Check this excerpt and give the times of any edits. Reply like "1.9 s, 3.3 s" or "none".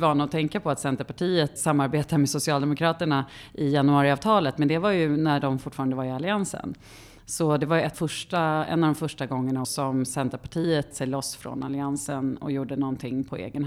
1.6 s, 7.9 s, 9.6 s, 10.9 s